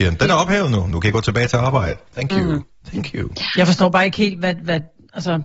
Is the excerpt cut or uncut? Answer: uncut